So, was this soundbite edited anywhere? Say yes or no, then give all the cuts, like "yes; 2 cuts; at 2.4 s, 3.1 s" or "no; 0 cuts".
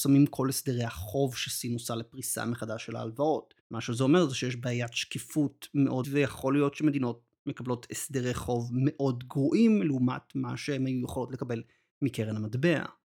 yes; 2 cuts; at 3.6 s, 6.0 s